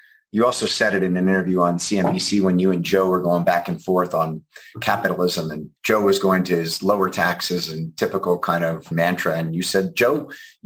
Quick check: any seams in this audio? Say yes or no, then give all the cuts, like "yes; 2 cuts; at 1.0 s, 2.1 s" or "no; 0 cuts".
yes; 2 cuts; at 5.8 s, 8.9 s